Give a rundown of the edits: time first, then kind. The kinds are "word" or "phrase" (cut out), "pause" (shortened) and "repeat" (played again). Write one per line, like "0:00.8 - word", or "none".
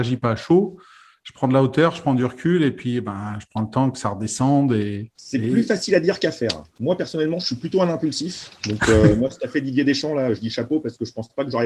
0:05.1 - pause
0:06.7 - pause
0:08.6 - pause